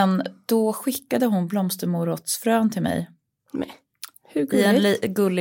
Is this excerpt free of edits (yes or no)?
yes